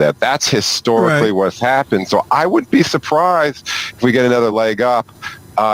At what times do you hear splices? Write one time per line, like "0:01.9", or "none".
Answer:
none